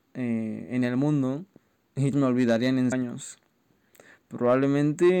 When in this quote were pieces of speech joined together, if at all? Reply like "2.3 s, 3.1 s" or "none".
2.1 s, 2.9 s